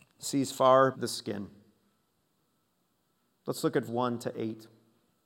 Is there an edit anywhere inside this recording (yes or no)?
yes